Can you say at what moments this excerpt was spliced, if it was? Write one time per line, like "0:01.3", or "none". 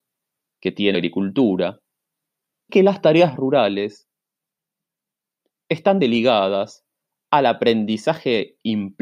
0:00.9
0:02.7
0:06.0